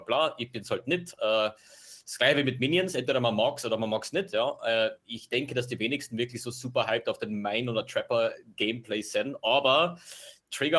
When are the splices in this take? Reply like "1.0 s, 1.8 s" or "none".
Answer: none

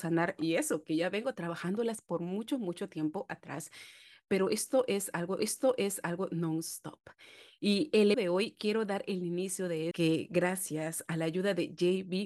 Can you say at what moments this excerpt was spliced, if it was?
5.4 s, 8.1 s, 9.9 s

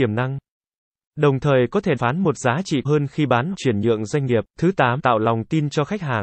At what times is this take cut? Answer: 2.0 s, 2.8 s, 3.5 s, 4.5 s, 5.0 s

